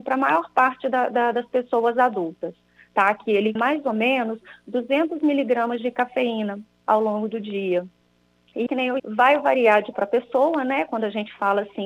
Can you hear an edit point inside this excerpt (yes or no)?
yes